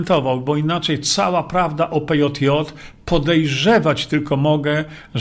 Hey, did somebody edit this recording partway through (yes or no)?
no